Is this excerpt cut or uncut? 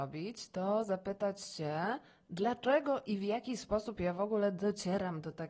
uncut